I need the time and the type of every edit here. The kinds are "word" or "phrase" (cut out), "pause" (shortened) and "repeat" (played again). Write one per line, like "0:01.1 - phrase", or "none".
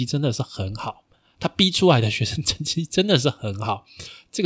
none